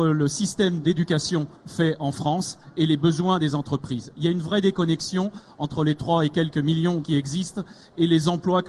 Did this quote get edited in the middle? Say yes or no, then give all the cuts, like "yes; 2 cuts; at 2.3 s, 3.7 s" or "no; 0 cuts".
yes; 2 cuts; at 1.6 s, 7.0 s